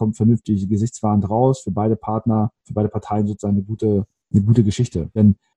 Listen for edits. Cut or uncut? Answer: cut